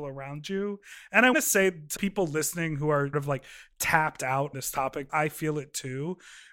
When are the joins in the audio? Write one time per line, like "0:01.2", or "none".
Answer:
0:01.3
0:02.0
0:03.1
0:04.5
0:05.1